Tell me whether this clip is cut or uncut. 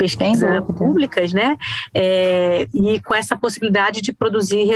uncut